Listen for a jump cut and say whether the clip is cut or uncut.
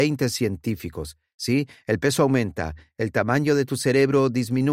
uncut